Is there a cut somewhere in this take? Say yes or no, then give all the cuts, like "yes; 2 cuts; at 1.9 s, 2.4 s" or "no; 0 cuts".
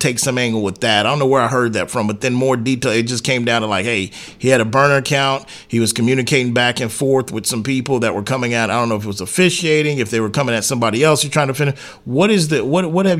no; 0 cuts